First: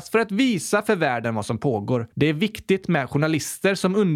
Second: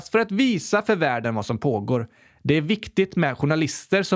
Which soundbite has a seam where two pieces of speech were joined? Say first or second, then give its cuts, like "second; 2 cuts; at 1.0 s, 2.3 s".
first; 1 cut; at 2.1 s